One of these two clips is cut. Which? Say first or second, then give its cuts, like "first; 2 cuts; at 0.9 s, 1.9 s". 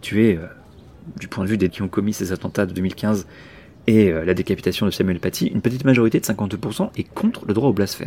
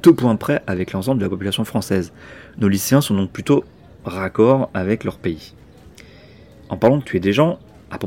first; 1 cut; at 1.7 s